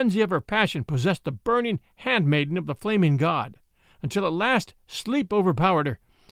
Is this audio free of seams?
yes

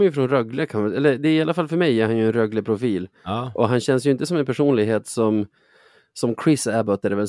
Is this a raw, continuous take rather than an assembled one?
yes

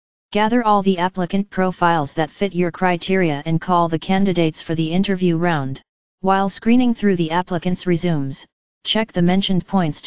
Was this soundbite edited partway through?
yes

